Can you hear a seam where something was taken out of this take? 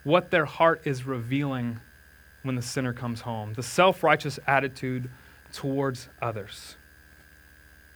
no; 0 cuts

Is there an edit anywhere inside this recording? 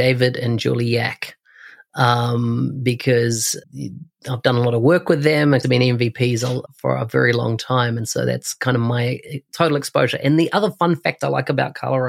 yes; 3 cuts; at 3.6 s, 5.6 s, 6.7 s

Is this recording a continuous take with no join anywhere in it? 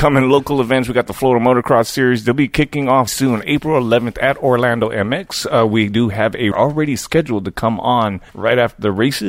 no; 3 cuts; at 3.1 s, 6.5 s, 8.3 s

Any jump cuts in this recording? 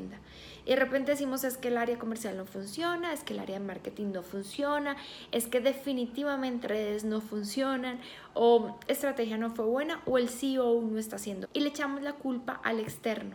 yes; 3 cuts; at 6.6 s, 8.9 s, 11.4 s

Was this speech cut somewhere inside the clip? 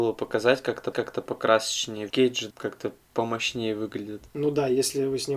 yes; 4 cuts; at 0.9 s, 2.1 s, 2.5 s, 4.3 s

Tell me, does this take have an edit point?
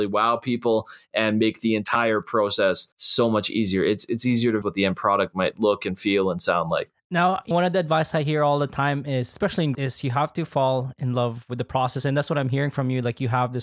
yes; 4 cuts; at 2.9 s, 4.6 s, 7.5 s, 9.7 s

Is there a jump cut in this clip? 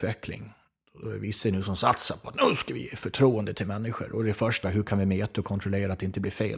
yes; 1 cut; at 4.6 s

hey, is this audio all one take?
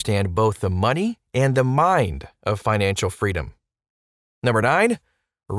yes; 0 cuts

